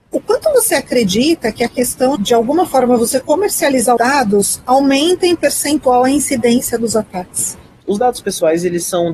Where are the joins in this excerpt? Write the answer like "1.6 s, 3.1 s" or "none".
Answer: 2.1 s, 3.2 s, 4.0 s